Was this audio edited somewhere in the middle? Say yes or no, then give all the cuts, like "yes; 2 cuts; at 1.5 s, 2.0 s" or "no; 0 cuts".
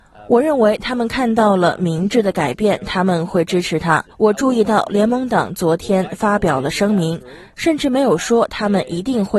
yes; 1 cut; at 4.1 s